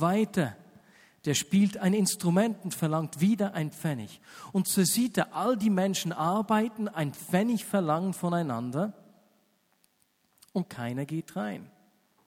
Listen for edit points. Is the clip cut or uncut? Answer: uncut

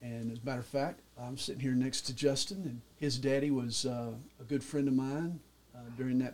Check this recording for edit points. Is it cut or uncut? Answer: cut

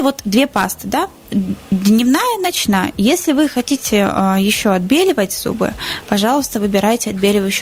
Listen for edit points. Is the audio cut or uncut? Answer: uncut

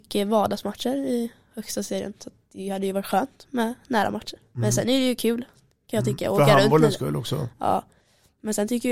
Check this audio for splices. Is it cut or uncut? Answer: uncut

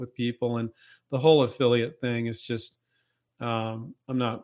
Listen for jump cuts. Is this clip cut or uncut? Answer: uncut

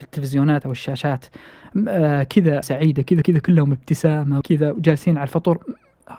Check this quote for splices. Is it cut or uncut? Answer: cut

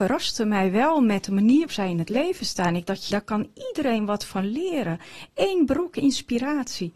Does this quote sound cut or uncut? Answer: cut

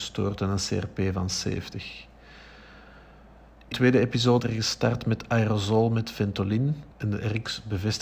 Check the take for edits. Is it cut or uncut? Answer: cut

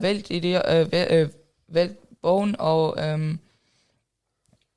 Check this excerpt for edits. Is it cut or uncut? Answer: uncut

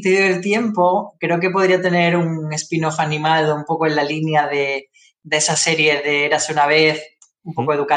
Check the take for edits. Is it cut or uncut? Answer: uncut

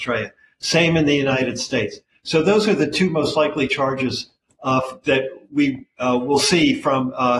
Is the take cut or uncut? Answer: uncut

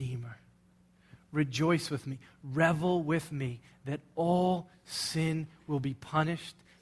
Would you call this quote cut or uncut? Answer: uncut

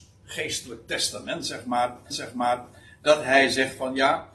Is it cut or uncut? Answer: cut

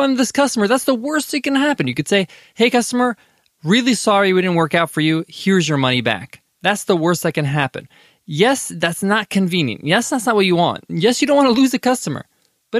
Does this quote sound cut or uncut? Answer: uncut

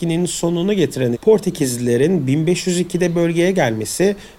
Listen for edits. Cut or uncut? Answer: cut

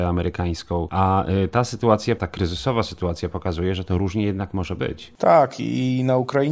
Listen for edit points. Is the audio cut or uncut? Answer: cut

